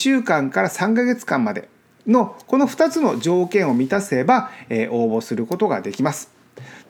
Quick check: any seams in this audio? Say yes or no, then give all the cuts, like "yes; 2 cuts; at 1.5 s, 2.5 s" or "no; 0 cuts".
no; 0 cuts